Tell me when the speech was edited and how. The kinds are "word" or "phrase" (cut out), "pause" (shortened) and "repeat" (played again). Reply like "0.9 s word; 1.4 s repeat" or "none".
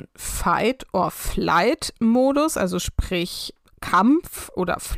none